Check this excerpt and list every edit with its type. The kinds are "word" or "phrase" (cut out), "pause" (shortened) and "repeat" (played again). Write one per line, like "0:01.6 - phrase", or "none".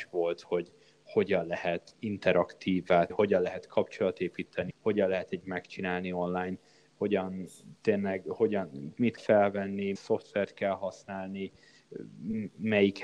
0:01.9 - word
0:03.1 - word
0:04.7 - word
0:05.4 - word
0:09.2 - word
0:10.0 - word